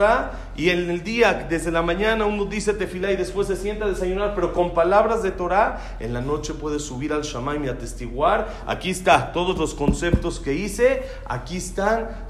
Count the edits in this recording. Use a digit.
0